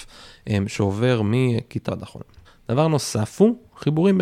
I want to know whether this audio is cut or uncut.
cut